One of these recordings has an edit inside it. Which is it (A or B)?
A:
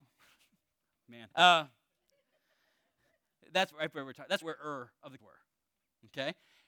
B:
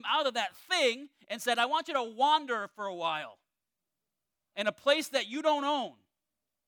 A